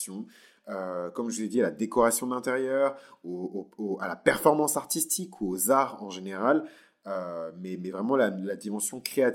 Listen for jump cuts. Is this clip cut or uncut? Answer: uncut